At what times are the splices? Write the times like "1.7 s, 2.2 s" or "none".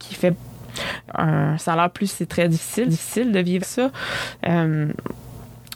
1.1 s, 2.1 s, 2.9 s, 3.6 s

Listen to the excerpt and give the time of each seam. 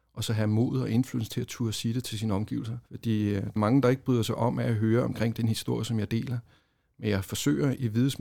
2.8 s, 3.6 s

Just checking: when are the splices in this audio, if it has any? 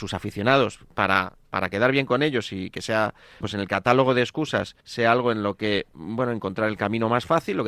3.4 s, 4.8 s

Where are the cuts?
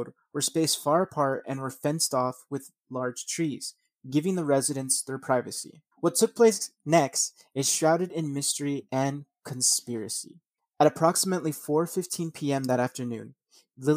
5.9 s, 10.6 s

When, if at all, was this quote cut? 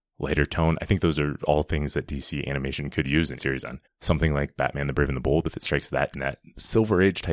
3.4 s, 3.8 s, 6.1 s

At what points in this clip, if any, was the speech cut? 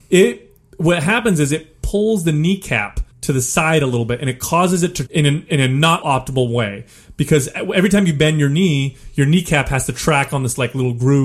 3.1 s, 5.1 s, 6.0 s

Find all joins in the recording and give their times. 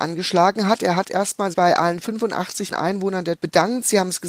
1.5 s, 2.7 s, 3.4 s

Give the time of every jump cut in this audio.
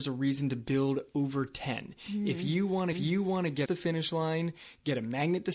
2.9 s, 3.7 s

